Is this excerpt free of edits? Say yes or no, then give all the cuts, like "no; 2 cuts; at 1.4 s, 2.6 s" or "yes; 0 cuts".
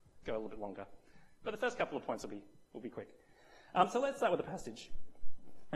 yes; 0 cuts